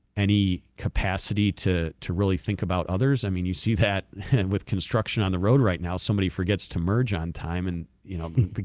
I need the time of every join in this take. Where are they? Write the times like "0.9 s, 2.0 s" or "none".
none